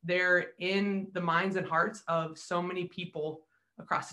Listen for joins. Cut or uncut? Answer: uncut